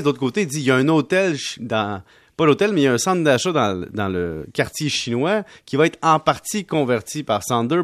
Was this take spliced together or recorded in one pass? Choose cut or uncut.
uncut